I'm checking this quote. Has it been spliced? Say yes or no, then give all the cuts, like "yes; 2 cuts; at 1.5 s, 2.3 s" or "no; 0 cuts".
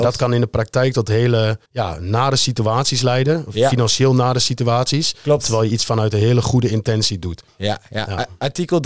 yes; 1 cut; at 1.7 s